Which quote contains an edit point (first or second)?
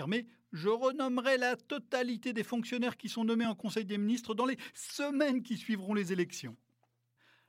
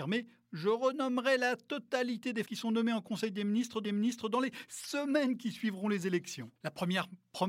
second